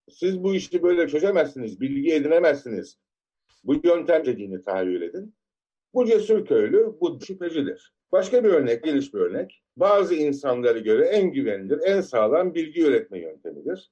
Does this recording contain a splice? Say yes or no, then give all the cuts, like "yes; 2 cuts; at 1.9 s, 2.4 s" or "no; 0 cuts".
yes; 5 cuts; at 4.2 s, 7.2 s, 8.0 s, 8.8 s, 9.8 s